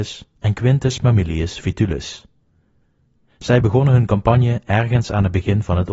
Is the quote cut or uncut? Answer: uncut